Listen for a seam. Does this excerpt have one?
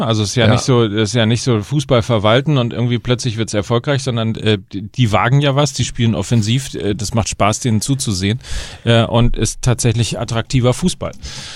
no; 0 cuts

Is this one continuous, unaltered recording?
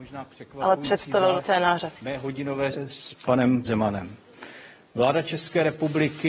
no; 3 cuts; at 1.4 s, 2.7 s, 3.6 s

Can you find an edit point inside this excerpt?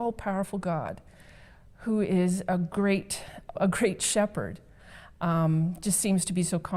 yes; 1 cut; at 3.5 s

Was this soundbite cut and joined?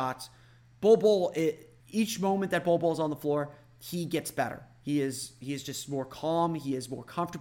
yes; 1 cut; at 1.8 s

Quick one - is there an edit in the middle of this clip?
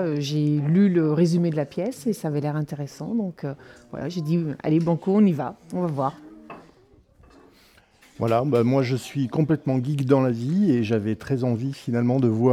no; 0 cuts

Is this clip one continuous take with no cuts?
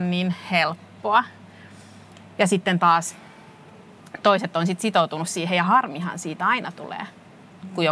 yes; 0 cuts

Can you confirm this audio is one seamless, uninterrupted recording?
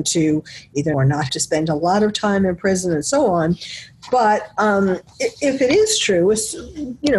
no; 2 cuts; at 0.9 s, 1.3 s

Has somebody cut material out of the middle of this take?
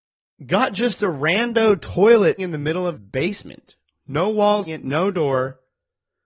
yes; 3 cuts; at 2.4 s, 2.9 s, 4.7 s

